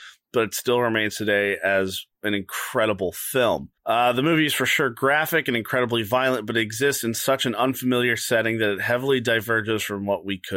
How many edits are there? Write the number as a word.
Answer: two